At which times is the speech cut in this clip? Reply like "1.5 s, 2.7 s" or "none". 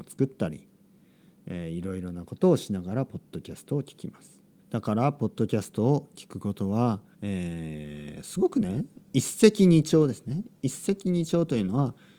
4.6 s, 7.1 s